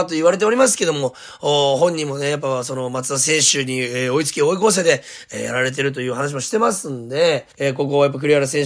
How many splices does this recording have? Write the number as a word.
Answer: one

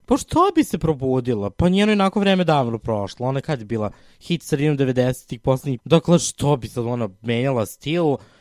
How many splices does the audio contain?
one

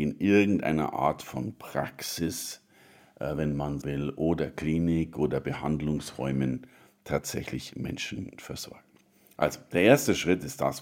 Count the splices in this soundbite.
one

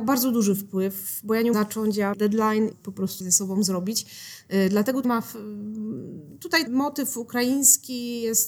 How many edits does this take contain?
six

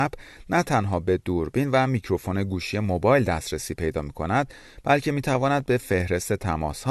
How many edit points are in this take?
zero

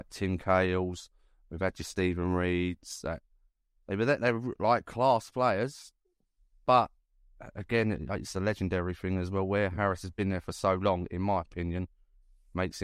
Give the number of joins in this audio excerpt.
zero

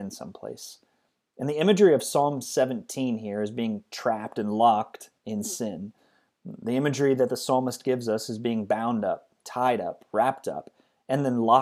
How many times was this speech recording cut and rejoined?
one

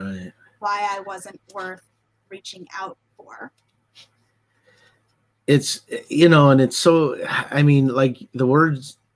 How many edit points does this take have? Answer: zero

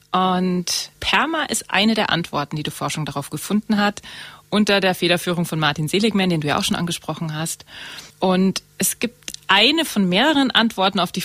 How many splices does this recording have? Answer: two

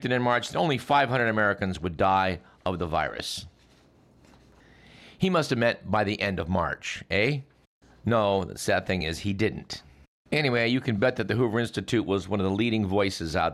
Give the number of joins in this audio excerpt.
zero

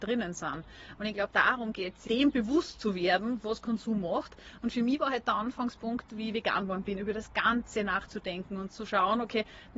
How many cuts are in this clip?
one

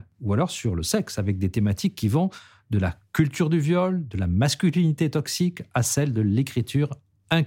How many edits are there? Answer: zero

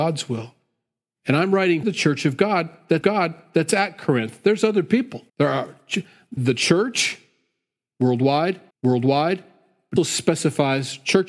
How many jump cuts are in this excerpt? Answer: six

